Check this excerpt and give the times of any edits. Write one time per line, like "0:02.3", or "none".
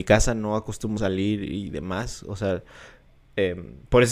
0:01.0